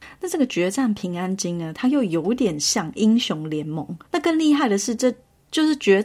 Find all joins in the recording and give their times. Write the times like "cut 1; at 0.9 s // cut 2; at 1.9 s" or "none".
cut 1; at 4.1 s